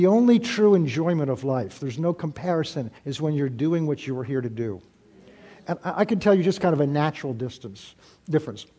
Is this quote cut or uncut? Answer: cut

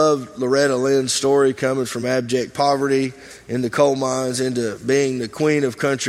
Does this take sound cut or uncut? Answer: uncut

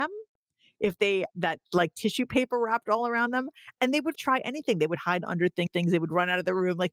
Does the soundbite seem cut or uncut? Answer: cut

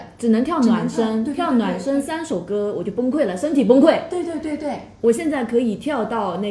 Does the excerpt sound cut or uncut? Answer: uncut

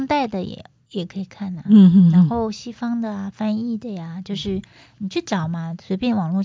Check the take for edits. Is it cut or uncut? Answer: uncut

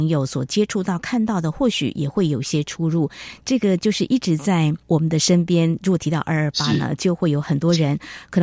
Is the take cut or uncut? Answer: cut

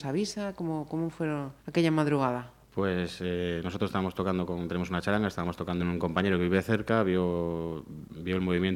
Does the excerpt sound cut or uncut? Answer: cut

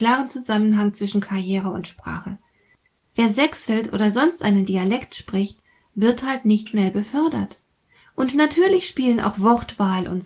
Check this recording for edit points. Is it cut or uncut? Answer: cut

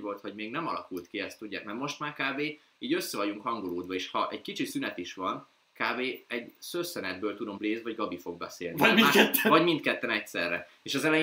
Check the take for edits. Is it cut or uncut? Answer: cut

